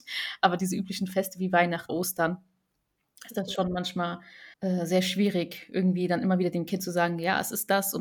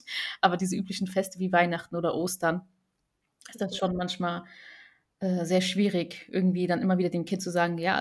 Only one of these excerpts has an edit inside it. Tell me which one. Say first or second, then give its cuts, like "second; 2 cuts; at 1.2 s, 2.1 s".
first; 2 cuts; at 1.9 s, 4.5 s